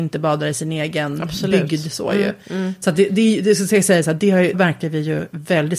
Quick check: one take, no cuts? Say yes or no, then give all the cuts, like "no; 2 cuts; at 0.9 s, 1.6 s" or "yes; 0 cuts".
no; 1 cut; at 4.5 s